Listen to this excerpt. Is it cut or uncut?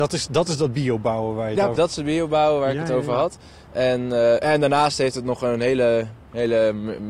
cut